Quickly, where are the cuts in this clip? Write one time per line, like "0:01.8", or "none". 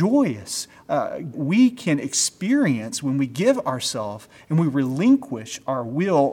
0:01.3